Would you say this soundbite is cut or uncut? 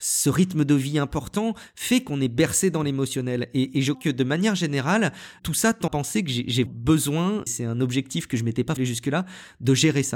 cut